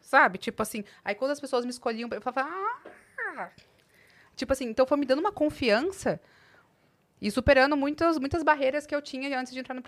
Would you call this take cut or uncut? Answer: uncut